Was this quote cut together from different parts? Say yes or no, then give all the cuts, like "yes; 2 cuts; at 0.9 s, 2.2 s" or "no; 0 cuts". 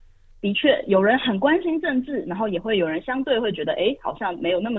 no; 0 cuts